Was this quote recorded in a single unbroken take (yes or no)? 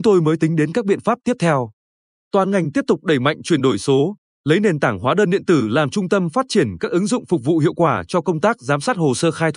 yes